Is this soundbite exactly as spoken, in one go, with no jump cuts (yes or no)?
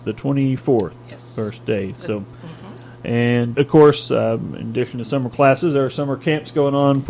no